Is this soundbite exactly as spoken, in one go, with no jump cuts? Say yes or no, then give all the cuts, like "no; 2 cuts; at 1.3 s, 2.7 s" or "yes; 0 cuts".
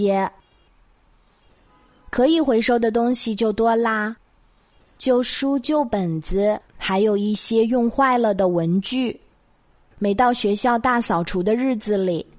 no; 1 cut; at 6.7 s